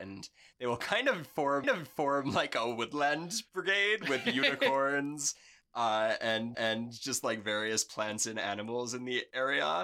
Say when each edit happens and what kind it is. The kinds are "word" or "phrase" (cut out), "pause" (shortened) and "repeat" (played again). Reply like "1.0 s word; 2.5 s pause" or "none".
1.6 s repeat; 6.5 s repeat